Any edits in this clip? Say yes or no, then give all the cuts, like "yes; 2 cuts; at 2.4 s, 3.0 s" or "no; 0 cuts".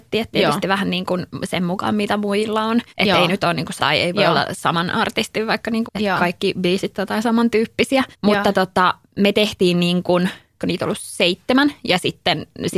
yes; 5 cuts; at 2.9 s, 3.8 s, 5.9 s, 8.1 s, 10.6 s